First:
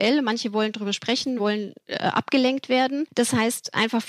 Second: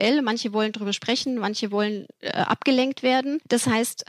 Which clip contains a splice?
first; 1 cut; at 1.4 s

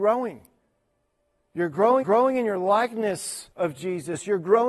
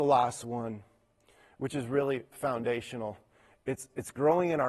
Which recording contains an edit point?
first; 2 cuts; at 2.0 s, 3.5 s

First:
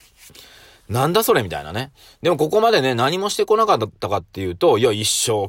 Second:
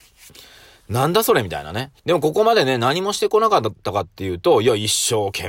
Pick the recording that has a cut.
second; 1 cut; at 2.0 s

